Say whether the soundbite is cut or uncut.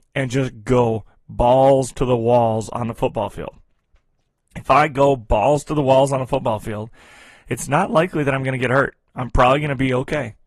uncut